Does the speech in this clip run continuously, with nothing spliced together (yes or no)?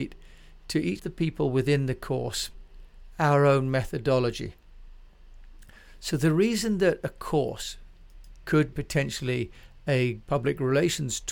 no